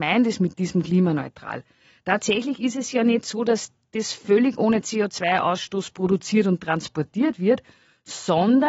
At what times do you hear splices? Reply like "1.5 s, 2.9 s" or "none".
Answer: none